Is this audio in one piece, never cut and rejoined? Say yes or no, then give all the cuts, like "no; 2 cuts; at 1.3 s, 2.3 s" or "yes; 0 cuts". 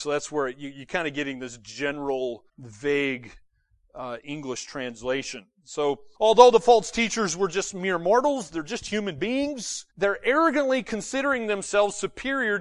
no; 3 cuts; at 2.5 s, 6.1 s, 9.9 s